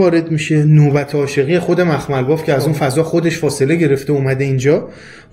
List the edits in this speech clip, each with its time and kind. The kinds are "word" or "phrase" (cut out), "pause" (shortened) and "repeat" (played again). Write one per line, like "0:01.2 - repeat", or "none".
none